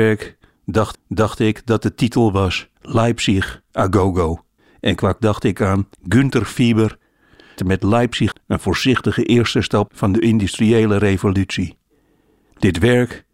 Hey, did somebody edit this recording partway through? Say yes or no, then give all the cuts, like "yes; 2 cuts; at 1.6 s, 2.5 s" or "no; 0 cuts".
yes; 8 cuts; at 0.9 s, 2.8 s, 4.6 s, 5.2 s, 5.9 s, 7.6 s, 8.3 s, 9.9 s